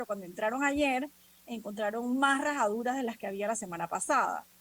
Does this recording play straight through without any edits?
yes; 0 cuts

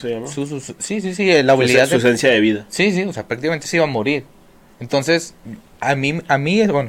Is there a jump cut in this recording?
no; 0 cuts

